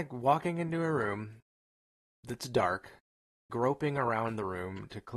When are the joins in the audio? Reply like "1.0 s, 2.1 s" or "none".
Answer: 3.5 s